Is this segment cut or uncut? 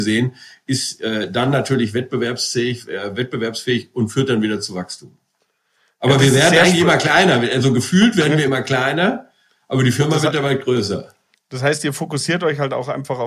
uncut